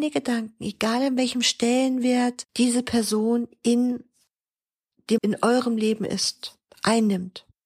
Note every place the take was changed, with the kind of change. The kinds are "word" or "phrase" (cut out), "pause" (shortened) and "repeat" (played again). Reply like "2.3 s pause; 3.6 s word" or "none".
2.5 s pause; 5.2 s word